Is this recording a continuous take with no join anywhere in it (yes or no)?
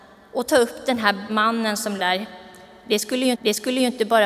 no